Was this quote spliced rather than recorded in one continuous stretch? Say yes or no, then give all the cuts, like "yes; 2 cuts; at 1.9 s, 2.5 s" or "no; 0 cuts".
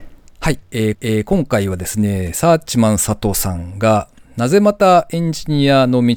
yes; 1 cut; at 0.9 s